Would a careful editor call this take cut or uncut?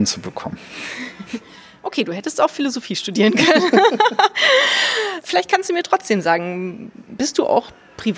uncut